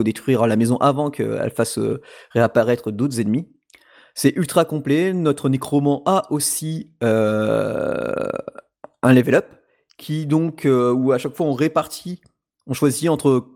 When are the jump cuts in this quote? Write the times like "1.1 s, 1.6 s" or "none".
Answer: none